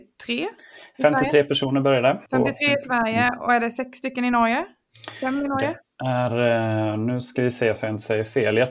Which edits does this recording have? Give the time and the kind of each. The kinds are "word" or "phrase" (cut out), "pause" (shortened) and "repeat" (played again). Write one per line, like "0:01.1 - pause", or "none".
0:02.3 - pause